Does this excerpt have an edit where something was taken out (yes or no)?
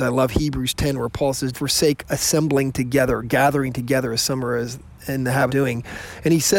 yes